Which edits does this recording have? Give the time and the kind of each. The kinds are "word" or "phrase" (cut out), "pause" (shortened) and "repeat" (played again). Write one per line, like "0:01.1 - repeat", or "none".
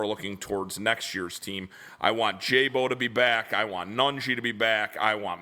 none